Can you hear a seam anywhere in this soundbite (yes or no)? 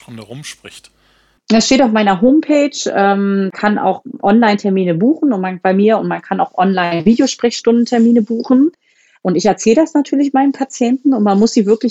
no